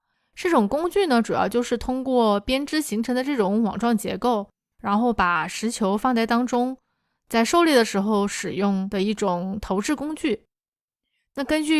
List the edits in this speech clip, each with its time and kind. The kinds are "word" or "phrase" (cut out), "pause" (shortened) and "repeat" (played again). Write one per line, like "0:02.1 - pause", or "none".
none